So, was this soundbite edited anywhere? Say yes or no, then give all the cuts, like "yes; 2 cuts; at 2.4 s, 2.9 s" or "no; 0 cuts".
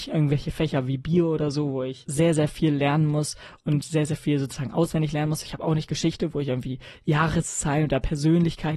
no; 0 cuts